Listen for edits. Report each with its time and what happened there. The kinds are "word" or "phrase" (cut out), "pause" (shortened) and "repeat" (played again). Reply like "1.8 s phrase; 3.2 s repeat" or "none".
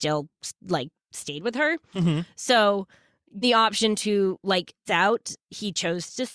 3.4 s word; 4.9 s word

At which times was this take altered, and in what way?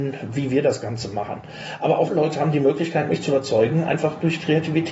2.1 s word

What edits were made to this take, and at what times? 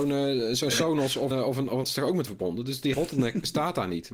1.3 s word; 1.8 s word; 2.3 s word; 2.9 s word

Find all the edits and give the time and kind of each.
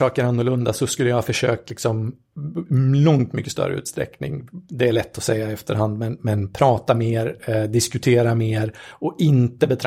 none

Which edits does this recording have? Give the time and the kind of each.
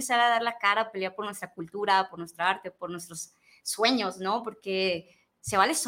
none

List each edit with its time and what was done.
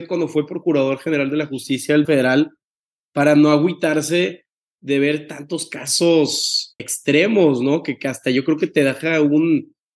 2.0 s word; 6.8 s word

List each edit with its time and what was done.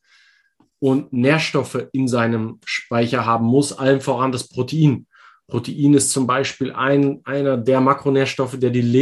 none

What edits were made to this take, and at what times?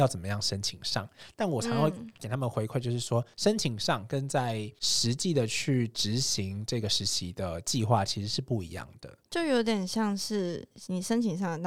9.3 s pause

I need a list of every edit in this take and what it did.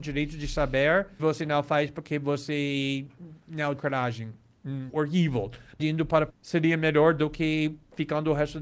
1.2 s word; 3.8 s word; 4.9 s word; 5.8 s word; 6.3 s word

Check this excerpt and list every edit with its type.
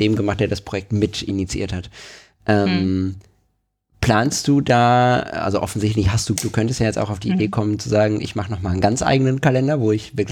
6.4 s phrase

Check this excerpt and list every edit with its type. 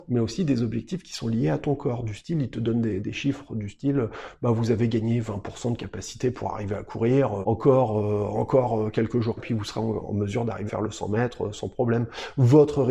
3.0 s word; 7.4 s word; 9.4 s phrase; 10.7 s word

